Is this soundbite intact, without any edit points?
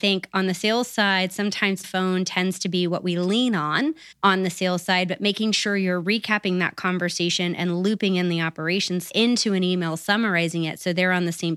no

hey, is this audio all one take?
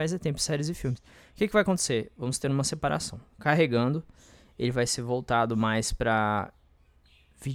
yes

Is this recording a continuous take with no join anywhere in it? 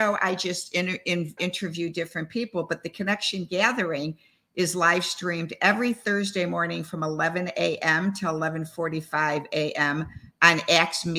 no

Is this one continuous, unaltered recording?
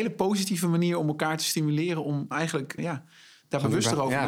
no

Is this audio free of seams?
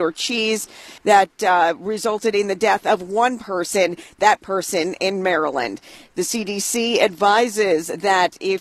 no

